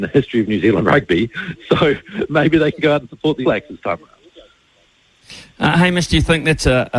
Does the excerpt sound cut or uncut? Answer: cut